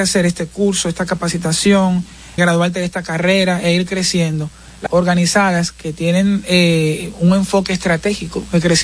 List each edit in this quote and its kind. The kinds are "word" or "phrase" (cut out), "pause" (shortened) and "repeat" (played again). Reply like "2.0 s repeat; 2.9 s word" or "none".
2.4 s word; 4.9 s phrase